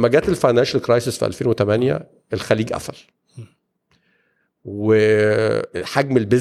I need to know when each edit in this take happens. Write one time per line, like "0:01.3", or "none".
none